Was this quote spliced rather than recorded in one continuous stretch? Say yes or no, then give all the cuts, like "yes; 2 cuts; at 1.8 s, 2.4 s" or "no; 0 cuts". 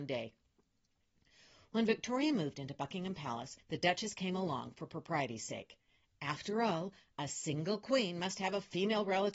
yes; 1 cut; at 3.6 s